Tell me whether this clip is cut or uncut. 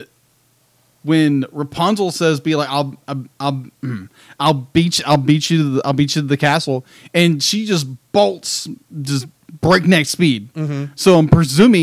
uncut